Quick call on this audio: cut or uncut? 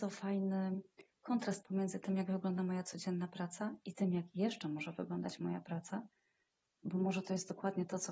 uncut